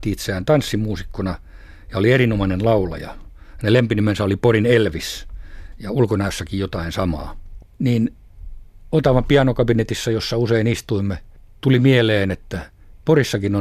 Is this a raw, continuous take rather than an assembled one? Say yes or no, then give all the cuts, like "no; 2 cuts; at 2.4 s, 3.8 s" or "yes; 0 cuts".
yes; 0 cuts